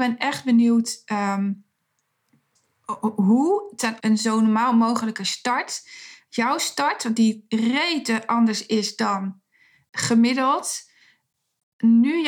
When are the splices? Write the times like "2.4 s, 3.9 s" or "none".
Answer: 4.0 s

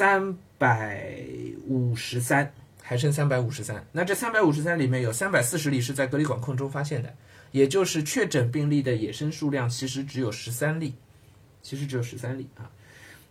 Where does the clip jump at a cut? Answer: none

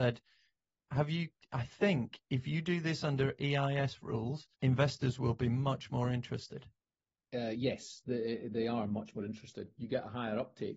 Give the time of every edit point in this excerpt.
4.5 s, 6.8 s

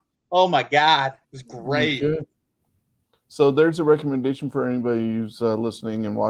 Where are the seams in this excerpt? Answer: 1.2 s

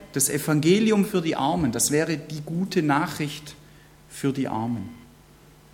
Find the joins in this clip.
none

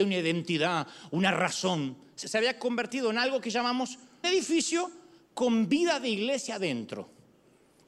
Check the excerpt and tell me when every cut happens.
2.2 s, 4.2 s

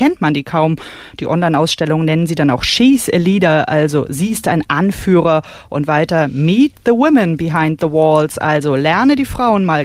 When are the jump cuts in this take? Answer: none

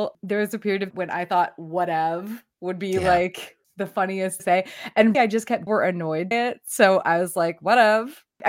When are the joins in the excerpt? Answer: 0.9 s, 4.4 s, 5.1 s, 5.7 s, 6.3 s

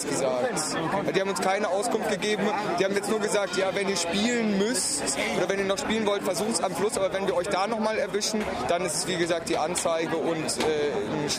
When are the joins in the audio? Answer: none

